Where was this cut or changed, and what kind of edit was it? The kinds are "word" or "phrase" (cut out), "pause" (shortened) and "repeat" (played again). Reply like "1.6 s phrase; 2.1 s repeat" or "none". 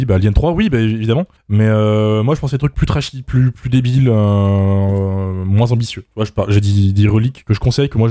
none